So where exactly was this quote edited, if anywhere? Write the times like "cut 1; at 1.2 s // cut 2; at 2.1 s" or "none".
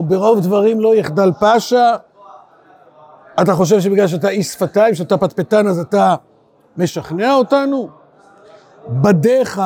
none